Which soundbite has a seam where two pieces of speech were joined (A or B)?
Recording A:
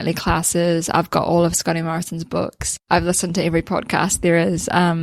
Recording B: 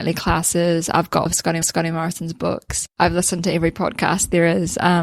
B